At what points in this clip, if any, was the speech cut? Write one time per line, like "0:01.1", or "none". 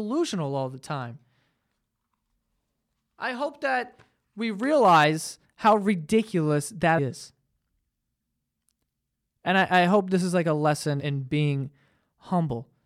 0:07.0
0:11.0